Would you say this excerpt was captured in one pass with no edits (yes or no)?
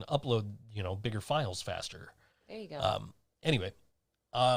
yes